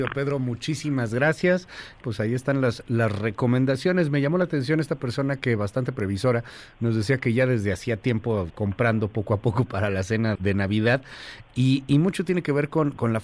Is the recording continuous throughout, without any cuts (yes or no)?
no